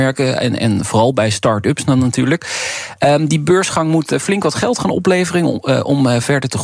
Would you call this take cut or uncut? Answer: uncut